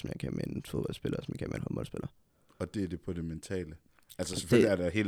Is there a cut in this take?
no; 0 cuts

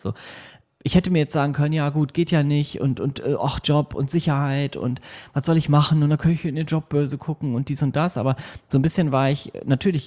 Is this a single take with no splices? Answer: yes; 0 cuts

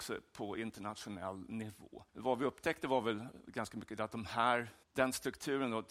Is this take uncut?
no; 2 cuts; at 2.1 s, 4.8 s

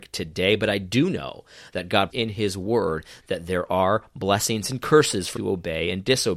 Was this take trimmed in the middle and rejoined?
yes; 2 cuts; at 2.1 s, 5.4 s

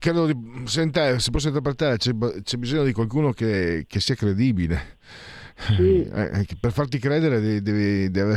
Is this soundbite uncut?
yes; 0 cuts

